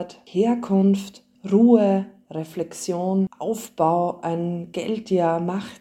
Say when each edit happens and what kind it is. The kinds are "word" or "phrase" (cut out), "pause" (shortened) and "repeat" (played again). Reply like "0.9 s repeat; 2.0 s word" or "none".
none

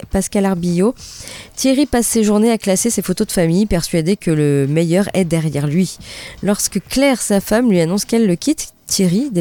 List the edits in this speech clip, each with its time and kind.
none

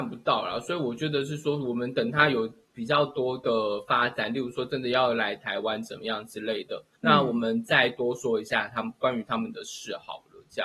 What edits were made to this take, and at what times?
7.0 s pause

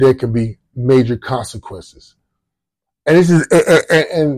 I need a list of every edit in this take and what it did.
none

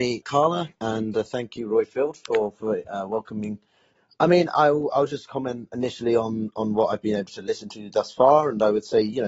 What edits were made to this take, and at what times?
none

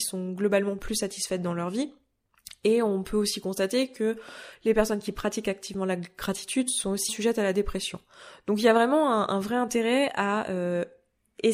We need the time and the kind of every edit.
7.1 s word

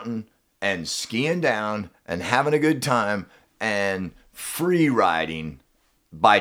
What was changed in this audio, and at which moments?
none

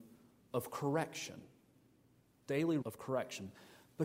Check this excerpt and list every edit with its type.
2.8 s word

